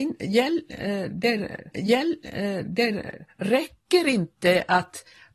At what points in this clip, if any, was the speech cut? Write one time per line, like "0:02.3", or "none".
0:01.7